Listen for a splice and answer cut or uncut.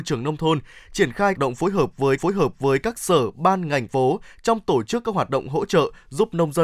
cut